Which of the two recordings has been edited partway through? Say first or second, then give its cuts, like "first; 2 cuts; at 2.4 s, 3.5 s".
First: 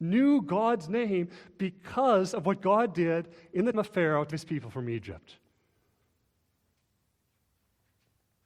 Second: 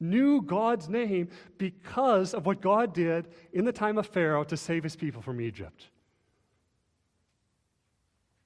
first; 2 cuts; at 3.7 s, 4.3 s